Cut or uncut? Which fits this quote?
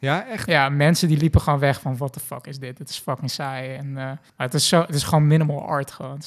cut